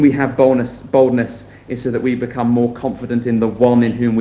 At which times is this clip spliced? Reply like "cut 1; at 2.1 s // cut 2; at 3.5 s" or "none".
none

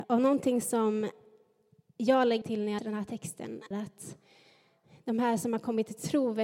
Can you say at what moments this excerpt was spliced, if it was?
cut 1; at 2.4 s // cut 2; at 2.8 s // cut 3; at 3.7 s

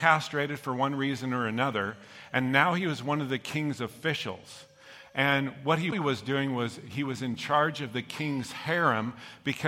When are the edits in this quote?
cut 1; at 5.9 s

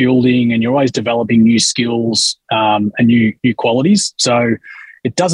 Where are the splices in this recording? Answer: none

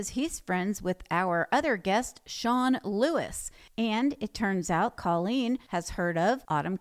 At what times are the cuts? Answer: cut 1; at 5.0 s

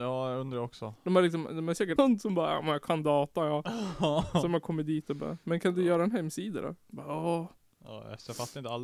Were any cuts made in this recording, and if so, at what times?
cut 1; at 2.0 s

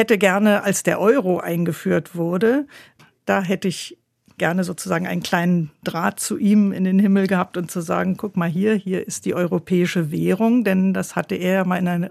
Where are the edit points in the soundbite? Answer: none

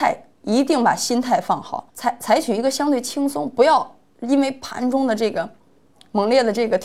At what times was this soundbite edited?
cut 1; at 1.9 s

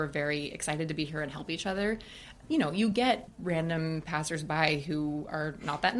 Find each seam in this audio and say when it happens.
none

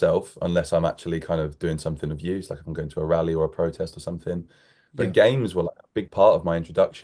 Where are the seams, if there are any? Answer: none

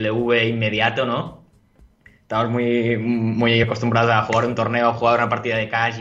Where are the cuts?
none

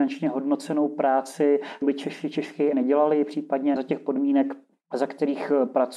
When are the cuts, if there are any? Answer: cut 1; at 1.8 s // cut 2; at 2.7 s // cut 3; at 3.8 s

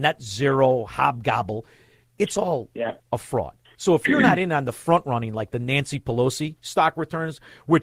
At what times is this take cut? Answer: none

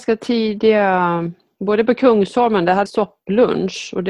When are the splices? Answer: cut 1; at 2.9 s

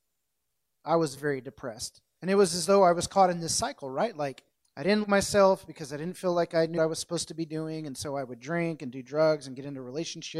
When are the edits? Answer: cut 1; at 1.2 s // cut 2; at 4.5 s // cut 3; at 5.0 s // cut 4; at 6.8 s

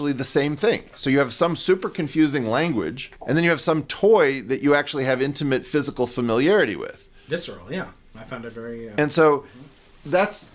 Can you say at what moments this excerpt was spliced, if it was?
cut 1; at 3.2 s

